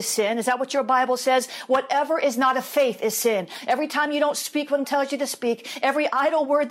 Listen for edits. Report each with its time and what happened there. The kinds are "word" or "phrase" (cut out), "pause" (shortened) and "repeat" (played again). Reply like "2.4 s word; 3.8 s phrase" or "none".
4.8 s word